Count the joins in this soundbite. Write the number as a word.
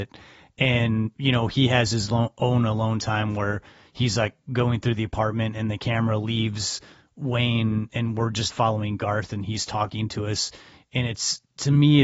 one